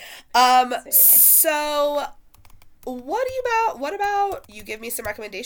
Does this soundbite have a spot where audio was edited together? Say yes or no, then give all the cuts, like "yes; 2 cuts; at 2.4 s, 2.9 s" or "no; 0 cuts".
yes; 2 cuts; at 2.8 s, 4.5 s